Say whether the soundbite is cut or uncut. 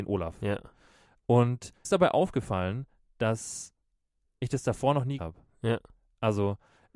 cut